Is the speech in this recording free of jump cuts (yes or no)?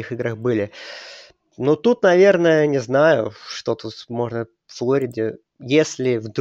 yes